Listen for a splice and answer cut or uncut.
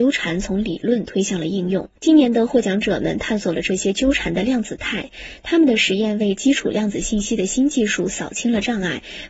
cut